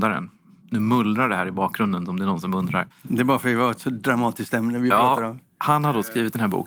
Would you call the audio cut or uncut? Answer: cut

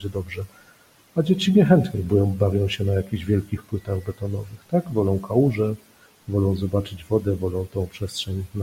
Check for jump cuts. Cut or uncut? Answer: uncut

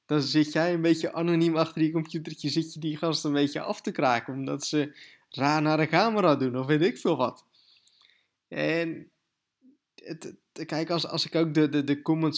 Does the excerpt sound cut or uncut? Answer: uncut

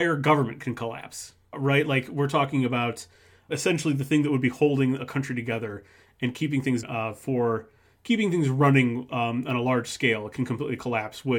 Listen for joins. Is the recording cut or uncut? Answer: cut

